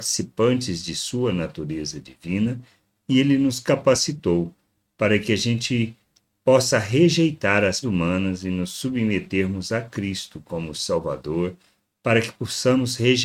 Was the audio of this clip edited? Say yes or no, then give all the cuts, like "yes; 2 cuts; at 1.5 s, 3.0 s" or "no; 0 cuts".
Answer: yes; 2 cuts; at 7.8 s, 10.7 s